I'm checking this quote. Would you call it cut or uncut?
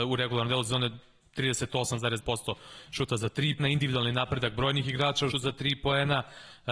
cut